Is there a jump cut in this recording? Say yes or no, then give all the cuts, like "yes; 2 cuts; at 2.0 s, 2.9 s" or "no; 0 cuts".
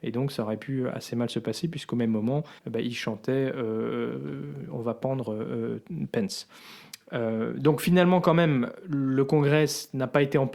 yes; 1 cut; at 2.6 s